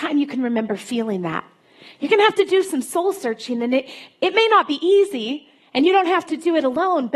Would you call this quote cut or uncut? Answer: uncut